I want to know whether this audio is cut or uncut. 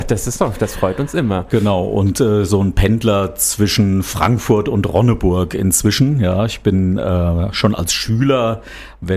uncut